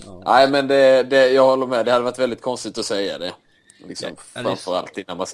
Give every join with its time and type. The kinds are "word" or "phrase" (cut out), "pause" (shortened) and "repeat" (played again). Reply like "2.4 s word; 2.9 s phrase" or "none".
none